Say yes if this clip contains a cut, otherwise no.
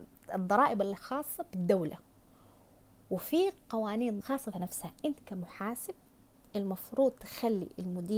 yes